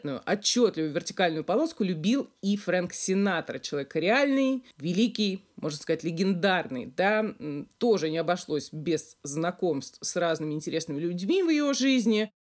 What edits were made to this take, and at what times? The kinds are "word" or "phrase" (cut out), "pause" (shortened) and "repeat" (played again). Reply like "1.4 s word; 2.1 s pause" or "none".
4.7 s pause